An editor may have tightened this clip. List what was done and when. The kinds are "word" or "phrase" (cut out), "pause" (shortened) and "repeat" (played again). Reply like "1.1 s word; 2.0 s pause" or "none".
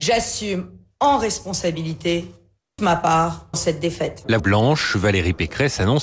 2.8 s word; 3.5 s word; 4.4 s word